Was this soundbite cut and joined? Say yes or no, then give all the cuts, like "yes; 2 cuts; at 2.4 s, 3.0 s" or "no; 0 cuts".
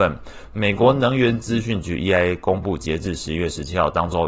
no; 0 cuts